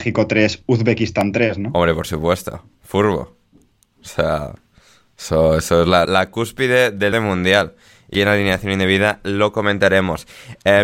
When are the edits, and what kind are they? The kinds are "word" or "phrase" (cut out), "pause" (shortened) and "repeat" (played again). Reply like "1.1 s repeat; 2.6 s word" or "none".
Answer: 6.1 s word; 7.1 s word; 8.1 s word